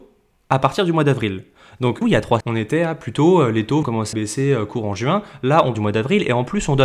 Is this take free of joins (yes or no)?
no